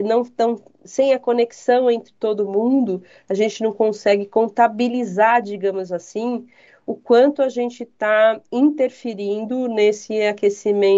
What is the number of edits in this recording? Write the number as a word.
zero